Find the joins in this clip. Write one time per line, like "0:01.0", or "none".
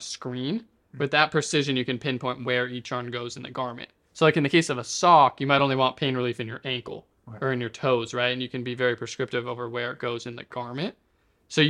none